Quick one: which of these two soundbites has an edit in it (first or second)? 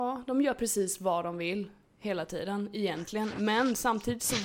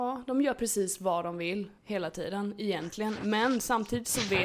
second